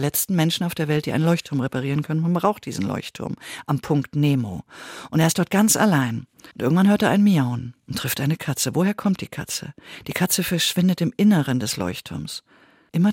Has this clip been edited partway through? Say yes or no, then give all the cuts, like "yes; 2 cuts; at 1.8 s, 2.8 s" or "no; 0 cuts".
yes; 1 cut; at 6.5 s